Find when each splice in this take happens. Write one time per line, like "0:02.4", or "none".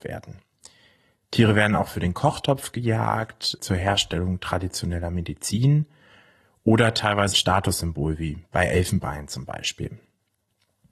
0:03.6
0:07.3